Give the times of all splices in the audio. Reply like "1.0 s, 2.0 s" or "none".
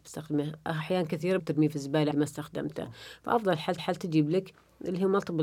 1.4 s, 2.1 s, 3.8 s